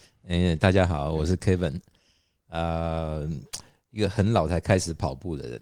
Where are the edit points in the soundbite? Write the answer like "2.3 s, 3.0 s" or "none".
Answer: none